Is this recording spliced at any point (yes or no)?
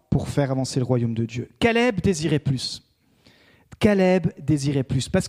no